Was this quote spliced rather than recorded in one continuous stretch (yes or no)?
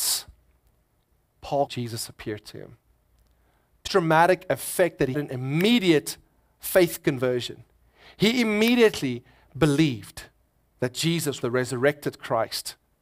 yes